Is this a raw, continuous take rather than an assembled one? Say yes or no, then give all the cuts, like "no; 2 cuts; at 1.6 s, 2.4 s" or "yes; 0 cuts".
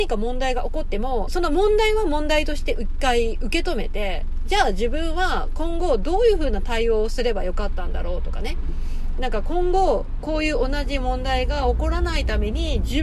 no; 2 cuts; at 1.3 s, 10.2 s